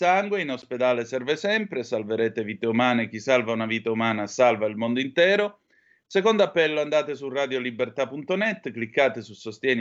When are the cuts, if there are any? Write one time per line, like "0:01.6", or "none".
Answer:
none